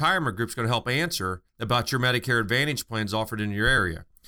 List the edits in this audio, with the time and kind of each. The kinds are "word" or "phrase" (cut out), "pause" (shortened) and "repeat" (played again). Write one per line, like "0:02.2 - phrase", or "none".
0:01.5 - pause